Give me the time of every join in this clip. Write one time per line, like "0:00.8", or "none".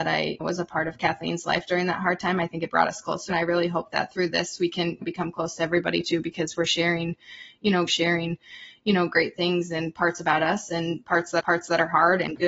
0:03.3
0:07.9
0:11.4